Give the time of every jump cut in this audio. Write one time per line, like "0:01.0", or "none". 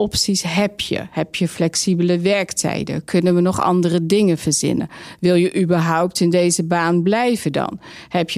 none